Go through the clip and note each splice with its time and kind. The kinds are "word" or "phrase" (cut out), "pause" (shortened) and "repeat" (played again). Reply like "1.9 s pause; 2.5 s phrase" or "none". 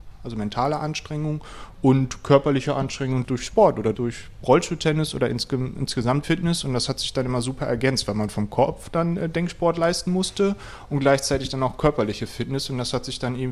3.2 s word; 3.9 s word; 6.2 s word